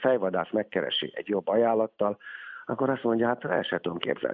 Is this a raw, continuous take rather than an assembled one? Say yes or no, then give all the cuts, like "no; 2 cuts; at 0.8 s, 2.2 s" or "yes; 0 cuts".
yes; 0 cuts